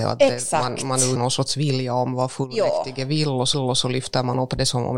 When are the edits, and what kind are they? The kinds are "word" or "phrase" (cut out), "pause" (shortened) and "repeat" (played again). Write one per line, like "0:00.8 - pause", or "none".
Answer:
0:01.2 - word
0:03.5 - repeat